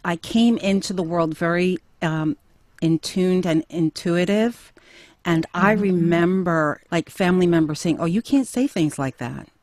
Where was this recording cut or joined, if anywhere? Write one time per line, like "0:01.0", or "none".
0:06.9